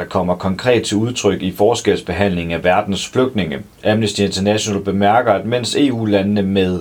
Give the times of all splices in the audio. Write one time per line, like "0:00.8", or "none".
0:03.7

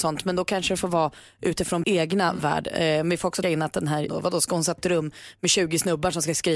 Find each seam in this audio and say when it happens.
0:01.8
0:03.4
0:04.1
0:04.8

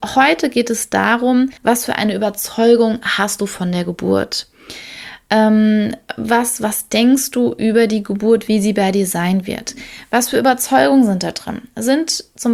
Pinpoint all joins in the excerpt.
0:01.6

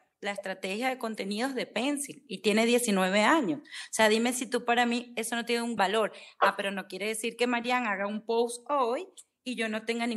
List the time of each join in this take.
0:05.8

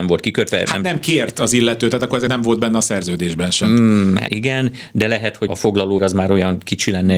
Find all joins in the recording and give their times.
0:02.3
0:04.3
0:05.5
0:06.0

